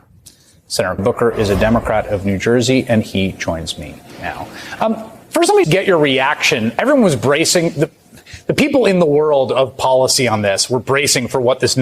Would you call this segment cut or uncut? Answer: cut